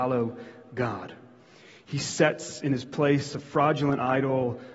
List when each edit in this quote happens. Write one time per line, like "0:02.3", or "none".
none